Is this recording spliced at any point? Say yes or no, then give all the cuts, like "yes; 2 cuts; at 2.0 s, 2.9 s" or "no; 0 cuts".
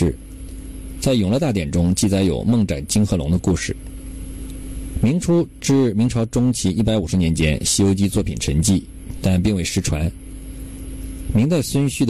no; 0 cuts